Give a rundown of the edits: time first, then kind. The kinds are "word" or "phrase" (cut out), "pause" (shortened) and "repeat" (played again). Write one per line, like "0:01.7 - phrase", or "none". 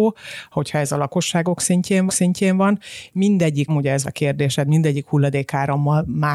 0:02.1 - repeat
0:03.7 - word
0:04.0 - word